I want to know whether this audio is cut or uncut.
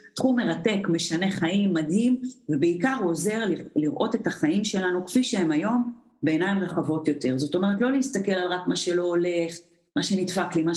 uncut